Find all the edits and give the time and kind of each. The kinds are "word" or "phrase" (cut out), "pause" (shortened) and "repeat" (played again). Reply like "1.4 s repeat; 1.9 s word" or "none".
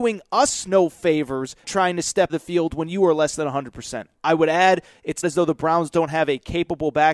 1.6 s word; 2.3 s word; 5.2 s word